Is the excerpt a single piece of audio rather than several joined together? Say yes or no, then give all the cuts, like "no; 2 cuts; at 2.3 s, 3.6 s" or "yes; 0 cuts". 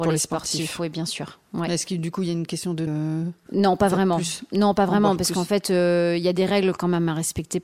no; 1 cut; at 2.9 s